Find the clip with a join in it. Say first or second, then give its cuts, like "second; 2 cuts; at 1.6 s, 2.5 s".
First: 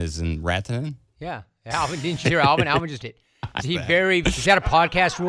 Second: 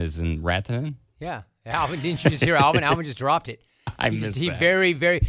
first; 4 cuts; at 2.2 s, 3.0 s, 3.6 s, 4.2 s